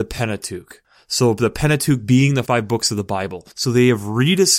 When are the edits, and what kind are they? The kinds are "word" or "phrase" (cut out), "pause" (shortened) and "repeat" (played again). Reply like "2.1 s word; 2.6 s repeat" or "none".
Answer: 2.5 s word; 3.5 s pause